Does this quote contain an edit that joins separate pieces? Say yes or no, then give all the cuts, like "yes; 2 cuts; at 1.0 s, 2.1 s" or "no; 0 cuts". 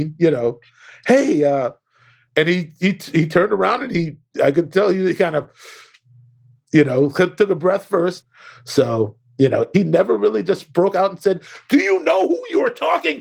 no; 0 cuts